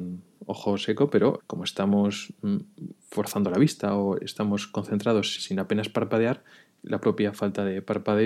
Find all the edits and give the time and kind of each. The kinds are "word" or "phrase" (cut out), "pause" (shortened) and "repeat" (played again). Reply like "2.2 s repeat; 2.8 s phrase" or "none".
1.4 s word; 3.0 s pause; 5.4 s word